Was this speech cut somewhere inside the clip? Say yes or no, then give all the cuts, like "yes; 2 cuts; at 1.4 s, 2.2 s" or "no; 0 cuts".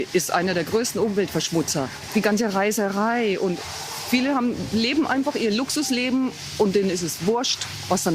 yes; 1 cut; at 4.1 s